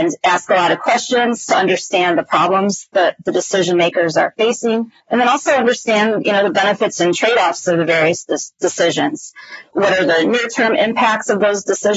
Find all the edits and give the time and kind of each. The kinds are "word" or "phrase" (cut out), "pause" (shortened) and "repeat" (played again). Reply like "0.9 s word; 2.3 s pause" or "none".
5.0 s pause; 9.7 s word